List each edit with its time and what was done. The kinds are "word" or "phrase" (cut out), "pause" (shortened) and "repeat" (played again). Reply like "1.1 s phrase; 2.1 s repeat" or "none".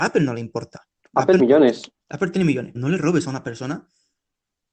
1.0 s pause; 1.4 s word; 2.0 s pause; 2.7 s word